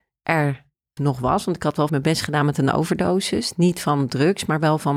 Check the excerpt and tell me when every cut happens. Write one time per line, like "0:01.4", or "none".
0:01.0
0:01.9